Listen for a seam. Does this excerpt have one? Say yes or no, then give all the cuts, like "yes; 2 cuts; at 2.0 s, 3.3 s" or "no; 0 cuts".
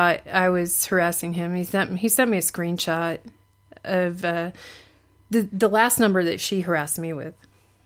no; 0 cuts